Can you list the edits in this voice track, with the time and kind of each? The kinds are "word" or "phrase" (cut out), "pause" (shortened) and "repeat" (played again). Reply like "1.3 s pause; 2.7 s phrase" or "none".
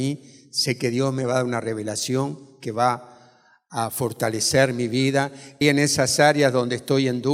5.6 s word